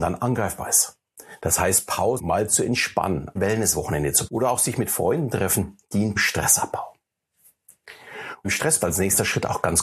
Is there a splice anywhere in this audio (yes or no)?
yes